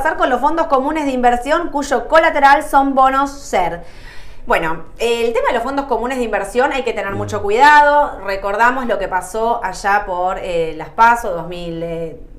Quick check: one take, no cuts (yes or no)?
yes